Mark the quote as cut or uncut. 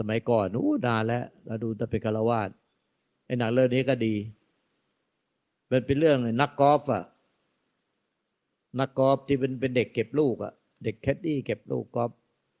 uncut